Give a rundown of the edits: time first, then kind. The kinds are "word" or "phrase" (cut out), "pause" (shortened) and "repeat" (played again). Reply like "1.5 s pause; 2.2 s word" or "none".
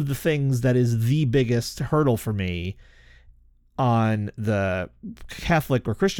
none